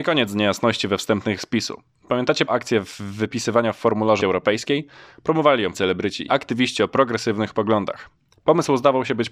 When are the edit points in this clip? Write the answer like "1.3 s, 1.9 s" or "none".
1.4 s, 2.5 s, 4.2 s, 5.7 s, 6.3 s, 7.5 s